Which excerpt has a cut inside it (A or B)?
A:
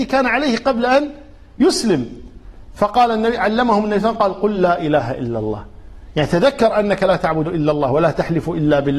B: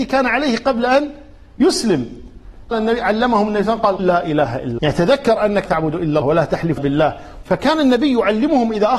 B